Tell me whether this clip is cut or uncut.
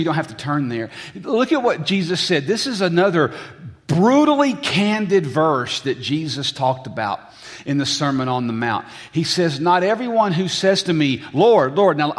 uncut